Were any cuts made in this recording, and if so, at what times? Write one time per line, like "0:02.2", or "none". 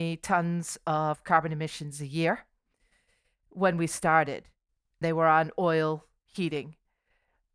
0:05.0